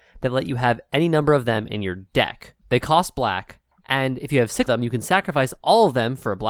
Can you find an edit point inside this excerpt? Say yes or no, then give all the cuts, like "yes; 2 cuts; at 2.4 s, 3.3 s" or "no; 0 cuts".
yes; 2 cuts; at 2.6 s, 4.7 s